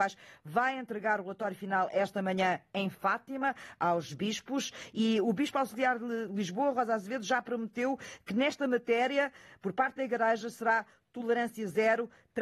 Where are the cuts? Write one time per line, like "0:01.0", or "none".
none